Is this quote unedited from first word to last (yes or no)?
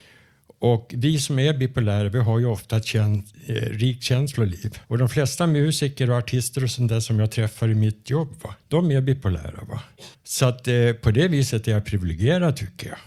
no